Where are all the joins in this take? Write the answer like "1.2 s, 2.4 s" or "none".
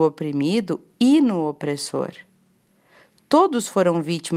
none